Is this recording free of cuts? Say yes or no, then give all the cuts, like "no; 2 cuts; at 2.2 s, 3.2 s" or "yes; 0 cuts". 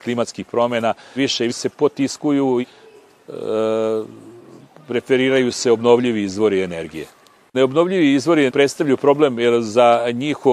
no; 4 cuts; at 1.2 s, 1.5 s, 2.6 s, 8.5 s